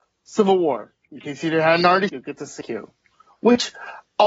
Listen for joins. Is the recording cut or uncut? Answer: cut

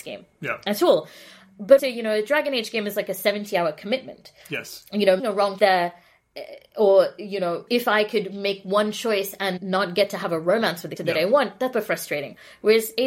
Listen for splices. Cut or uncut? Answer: cut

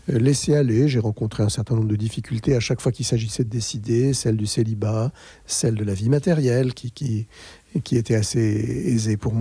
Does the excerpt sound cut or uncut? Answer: uncut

